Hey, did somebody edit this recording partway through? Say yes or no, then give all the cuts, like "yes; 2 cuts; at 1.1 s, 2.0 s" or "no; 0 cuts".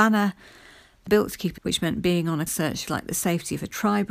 yes; 4 cuts; at 1.1 s, 1.6 s, 2.5 s, 2.9 s